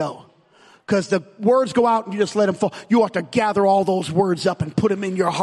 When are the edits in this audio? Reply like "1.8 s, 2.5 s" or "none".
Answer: none